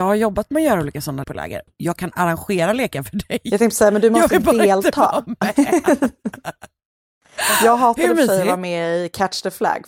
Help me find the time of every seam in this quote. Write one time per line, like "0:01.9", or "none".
0:01.2